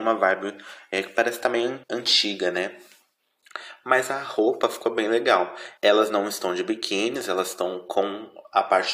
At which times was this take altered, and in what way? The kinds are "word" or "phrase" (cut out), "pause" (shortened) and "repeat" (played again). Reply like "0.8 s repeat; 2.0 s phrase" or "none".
1.8 s pause; 5.8 s pause

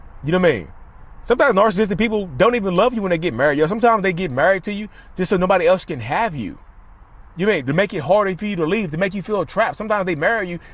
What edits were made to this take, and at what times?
7.3 s pause

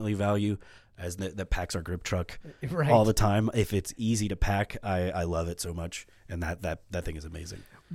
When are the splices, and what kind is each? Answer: 1.2 s word

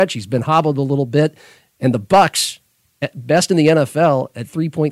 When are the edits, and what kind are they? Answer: none

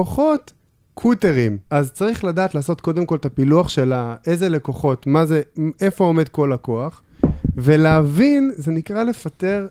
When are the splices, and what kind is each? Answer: 1.7 s pause

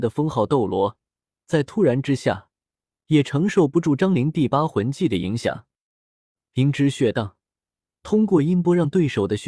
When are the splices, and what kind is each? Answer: none

